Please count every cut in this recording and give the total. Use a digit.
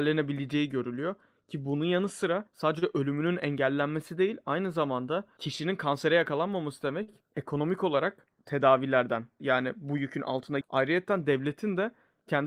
3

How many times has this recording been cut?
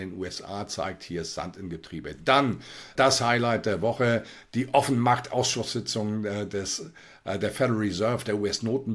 1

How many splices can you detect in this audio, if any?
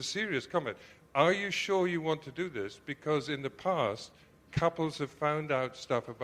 0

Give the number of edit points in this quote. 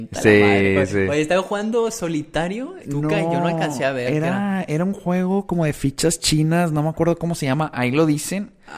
1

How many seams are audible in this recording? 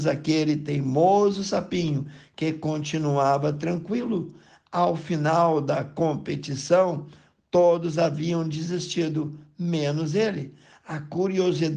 0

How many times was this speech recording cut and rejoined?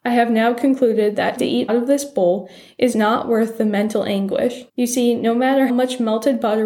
5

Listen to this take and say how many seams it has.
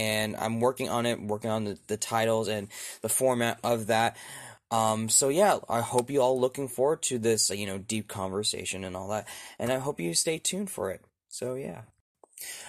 0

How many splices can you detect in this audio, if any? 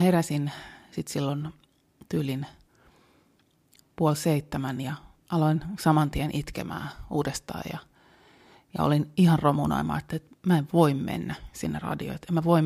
0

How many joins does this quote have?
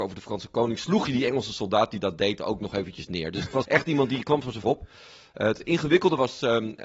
2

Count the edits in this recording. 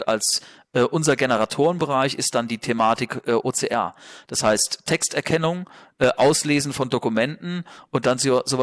0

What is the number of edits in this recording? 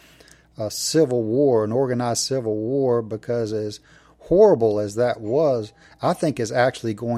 0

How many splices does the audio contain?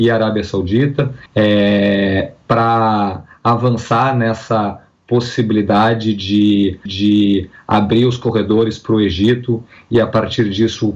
2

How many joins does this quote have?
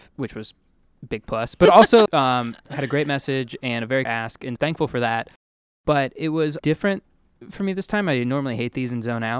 4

